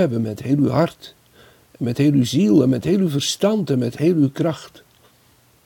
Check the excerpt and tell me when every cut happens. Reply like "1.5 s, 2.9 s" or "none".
none